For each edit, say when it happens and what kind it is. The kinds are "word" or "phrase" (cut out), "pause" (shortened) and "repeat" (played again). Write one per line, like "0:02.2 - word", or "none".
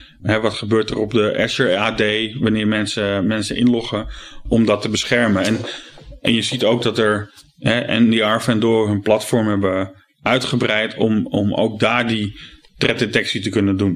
none